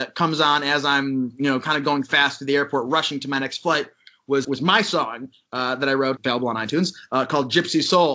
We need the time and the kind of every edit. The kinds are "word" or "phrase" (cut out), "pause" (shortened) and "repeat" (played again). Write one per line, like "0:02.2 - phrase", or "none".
0:04.4 - word
0:06.2 - phrase